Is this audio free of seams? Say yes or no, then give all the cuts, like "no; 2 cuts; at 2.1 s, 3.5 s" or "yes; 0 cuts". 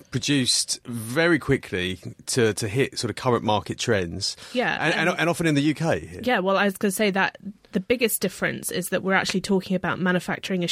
yes; 0 cuts